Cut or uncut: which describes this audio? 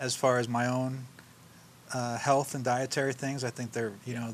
uncut